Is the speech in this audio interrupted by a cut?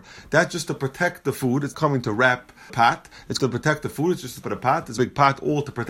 yes; 5 cuts; at 1.7 s, 2.7 s, 3.4 s, 4.4 s, 5.0 s

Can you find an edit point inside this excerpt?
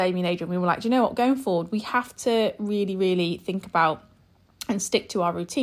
no; 0 cuts

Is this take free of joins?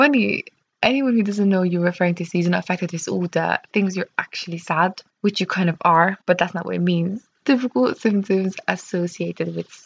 no; 3 cuts; at 5.1 s, 6.2 s, 7.3 s

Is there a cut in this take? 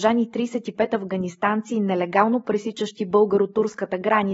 no; 0 cuts

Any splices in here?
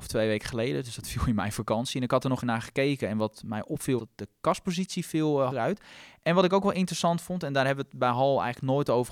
yes; 3 cuts; at 2.4 s, 4.0 s, 5.5 s

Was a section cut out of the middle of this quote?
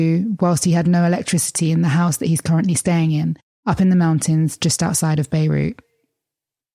no; 0 cuts

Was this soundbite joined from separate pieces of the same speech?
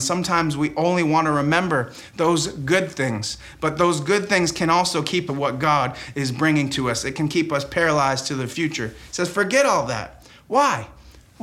yes; 1 cut; at 5.3 s

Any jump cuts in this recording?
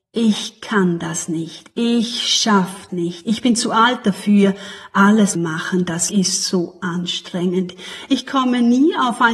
yes; 3 cuts; at 2.9 s, 5.4 s, 6.1 s

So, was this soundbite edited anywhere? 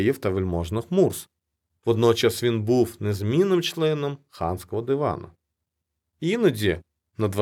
no; 0 cuts

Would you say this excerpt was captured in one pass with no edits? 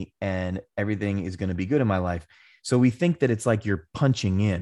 yes; 0 cuts

